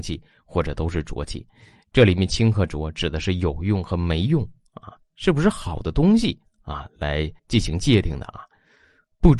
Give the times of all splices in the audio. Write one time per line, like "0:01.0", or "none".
0:07.4